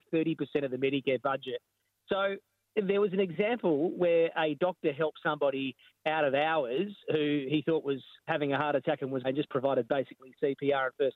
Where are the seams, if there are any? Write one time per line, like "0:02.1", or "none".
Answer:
0:08.3
0:09.2